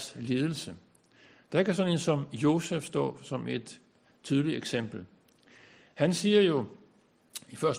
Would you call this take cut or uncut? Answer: uncut